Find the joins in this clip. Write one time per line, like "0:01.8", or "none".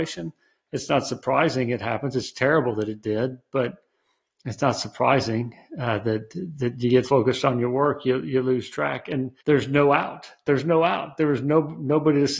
0:07.0
0:09.4